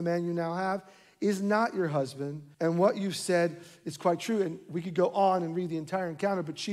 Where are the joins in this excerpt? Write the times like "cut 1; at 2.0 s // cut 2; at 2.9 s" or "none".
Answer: cut 1; at 2.5 s